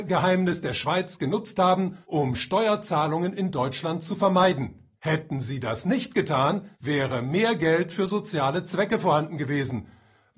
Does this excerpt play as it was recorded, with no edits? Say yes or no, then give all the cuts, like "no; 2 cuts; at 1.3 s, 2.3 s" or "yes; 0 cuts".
no; 3 cuts; at 2.0 s, 5.0 s, 6.7 s